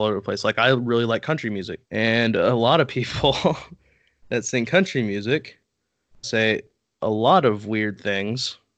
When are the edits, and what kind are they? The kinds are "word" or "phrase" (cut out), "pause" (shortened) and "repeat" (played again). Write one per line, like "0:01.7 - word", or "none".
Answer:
0:01.8 - pause
0:06.2 - word